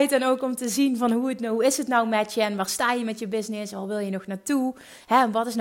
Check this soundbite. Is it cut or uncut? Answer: uncut